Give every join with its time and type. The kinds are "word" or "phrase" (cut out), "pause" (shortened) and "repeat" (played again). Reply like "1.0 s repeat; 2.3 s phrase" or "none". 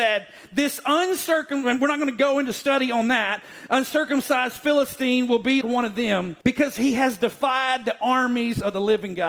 5.6 s word; 6.4 s pause